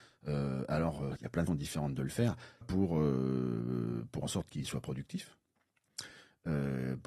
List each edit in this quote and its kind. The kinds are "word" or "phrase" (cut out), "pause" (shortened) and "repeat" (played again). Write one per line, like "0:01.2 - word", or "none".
0:01.2 - word
0:01.5 - word
0:02.6 - word
0:04.2 - word